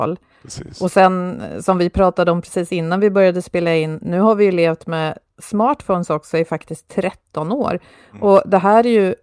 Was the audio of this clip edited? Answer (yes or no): no